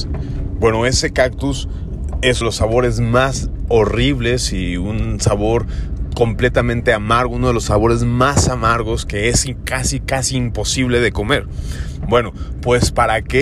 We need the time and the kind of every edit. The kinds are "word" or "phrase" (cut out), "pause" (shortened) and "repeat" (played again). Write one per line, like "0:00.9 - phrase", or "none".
0:02.4 - phrase